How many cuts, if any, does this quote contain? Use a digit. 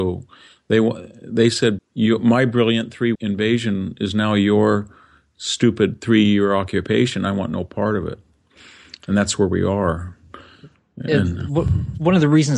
2